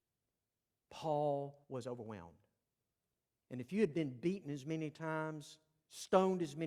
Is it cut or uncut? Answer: cut